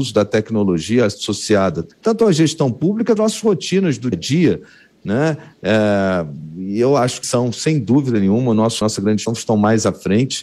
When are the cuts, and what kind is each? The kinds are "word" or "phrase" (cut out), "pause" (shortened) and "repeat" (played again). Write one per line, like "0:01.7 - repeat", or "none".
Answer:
0:01.9 - pause
0:03.2 - phrase
0:04.1 - word
0:07.2 - word
0:08.8 - phrase
0:09.3 - word